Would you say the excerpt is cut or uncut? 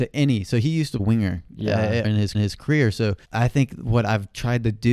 cut